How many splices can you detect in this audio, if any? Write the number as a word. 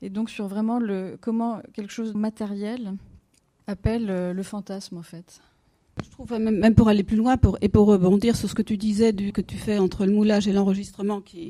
three